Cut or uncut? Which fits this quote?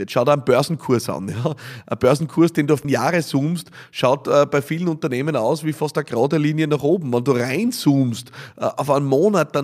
cut